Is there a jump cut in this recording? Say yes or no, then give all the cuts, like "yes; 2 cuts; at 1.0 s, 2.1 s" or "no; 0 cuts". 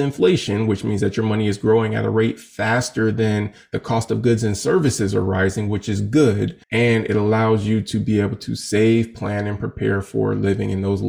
yes; 1 cut; at 6.6 s